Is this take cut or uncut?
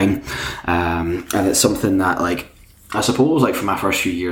uncut